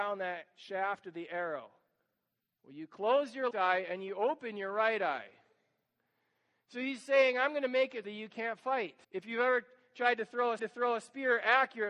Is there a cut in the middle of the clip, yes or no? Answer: yes